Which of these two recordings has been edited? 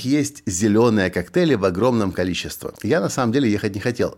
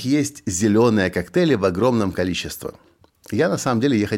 first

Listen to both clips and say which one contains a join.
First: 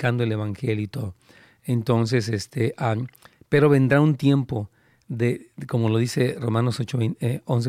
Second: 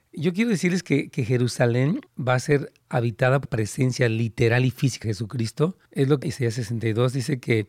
second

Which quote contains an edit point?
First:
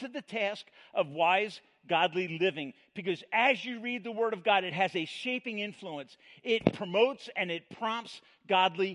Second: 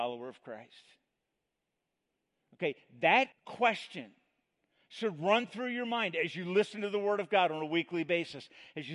second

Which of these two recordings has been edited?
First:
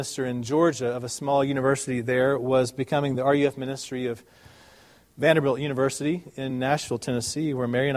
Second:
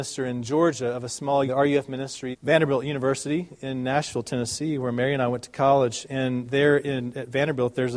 second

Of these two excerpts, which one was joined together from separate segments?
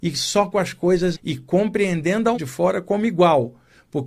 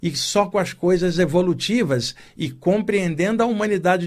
first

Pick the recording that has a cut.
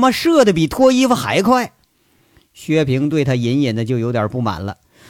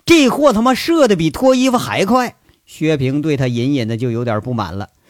second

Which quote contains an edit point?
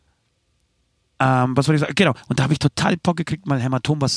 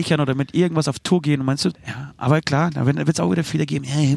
second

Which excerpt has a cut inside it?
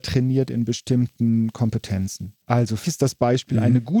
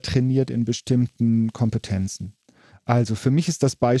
first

